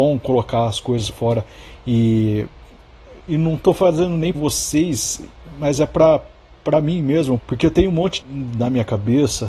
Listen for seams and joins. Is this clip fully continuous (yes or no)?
no